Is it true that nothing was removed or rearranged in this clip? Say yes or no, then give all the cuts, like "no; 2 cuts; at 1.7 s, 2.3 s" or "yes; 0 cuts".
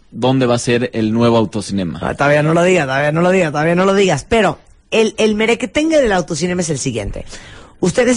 yes; 0 cuts